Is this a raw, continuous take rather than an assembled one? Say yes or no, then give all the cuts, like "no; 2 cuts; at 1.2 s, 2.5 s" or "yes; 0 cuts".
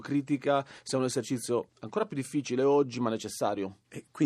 no; 1 cut; at 1.7 s